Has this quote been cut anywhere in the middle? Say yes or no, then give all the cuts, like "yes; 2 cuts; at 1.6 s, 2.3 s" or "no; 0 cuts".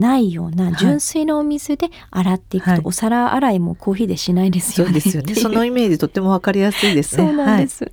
no; 0 cuts